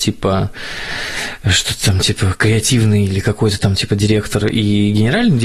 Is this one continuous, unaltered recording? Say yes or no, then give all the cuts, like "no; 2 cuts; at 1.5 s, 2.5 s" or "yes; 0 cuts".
yes; 0 cuts